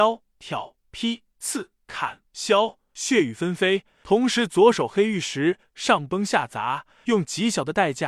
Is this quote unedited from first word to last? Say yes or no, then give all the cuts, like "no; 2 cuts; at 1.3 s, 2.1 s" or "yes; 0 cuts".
no; 1 cut; at 2.2 s